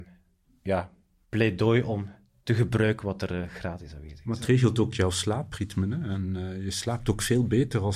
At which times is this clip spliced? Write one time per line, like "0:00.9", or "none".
none